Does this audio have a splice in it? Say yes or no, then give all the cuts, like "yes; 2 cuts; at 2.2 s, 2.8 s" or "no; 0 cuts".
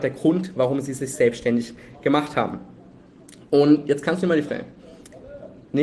yes; 1 cut; at 4.5 s